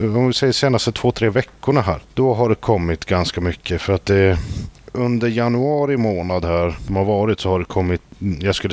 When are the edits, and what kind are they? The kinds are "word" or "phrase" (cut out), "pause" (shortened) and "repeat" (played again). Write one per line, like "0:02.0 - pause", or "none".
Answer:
0:02.0 - pause